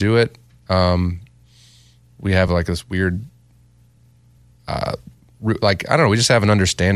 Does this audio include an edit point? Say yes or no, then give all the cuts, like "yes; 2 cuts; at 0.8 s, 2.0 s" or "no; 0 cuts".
no; 0 cuts